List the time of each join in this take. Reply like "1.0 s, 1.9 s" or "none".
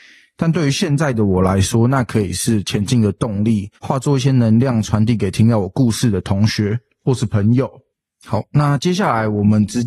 3.7 s, 7.9 s